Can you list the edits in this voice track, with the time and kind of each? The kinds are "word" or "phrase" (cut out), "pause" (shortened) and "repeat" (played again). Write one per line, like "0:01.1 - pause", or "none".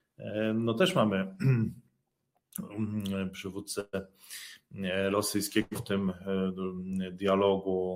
0:05.7 - word